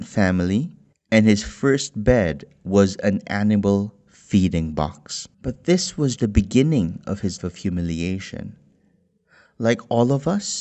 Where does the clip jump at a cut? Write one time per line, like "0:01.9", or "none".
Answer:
0:00.9
0:05.3
0:06.2
0:07.4